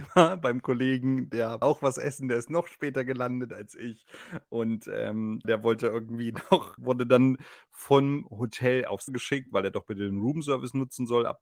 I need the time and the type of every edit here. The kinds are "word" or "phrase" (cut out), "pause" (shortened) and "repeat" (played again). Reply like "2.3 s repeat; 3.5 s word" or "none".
1.6 s word; 5.4 s word; 6.8 s word; 9.1 s word